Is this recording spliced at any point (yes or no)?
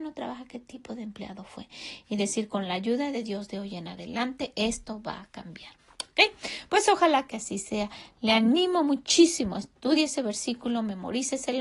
no